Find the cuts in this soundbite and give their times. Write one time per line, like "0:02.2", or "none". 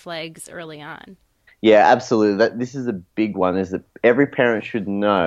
0:01.5